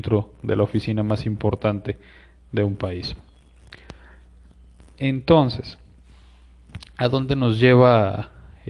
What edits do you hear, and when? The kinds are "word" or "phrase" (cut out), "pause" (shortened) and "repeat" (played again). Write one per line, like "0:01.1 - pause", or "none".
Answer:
none